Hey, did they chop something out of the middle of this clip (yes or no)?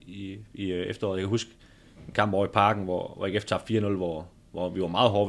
no